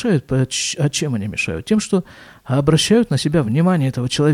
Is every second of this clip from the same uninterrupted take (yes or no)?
yes